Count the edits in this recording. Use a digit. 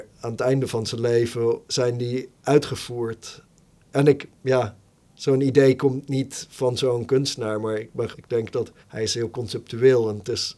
3